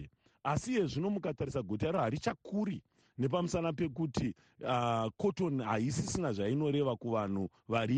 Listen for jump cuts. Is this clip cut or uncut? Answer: uncut